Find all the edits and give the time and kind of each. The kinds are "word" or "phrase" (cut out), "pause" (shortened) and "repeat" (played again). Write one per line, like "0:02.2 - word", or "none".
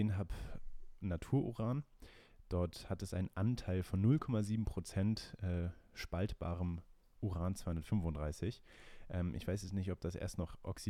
none